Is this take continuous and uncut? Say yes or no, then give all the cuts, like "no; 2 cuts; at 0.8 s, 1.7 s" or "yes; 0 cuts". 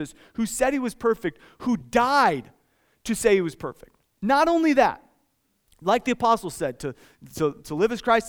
yes; 0 cuts